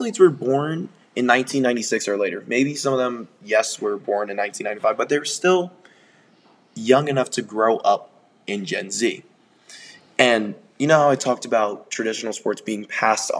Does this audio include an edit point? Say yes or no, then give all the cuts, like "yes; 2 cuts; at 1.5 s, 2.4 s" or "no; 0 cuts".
no; 0 cuts